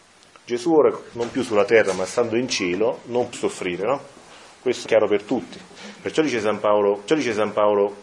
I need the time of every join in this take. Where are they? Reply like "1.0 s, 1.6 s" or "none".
1.1 s, 3.3 s, 4.9 s, 7.1 s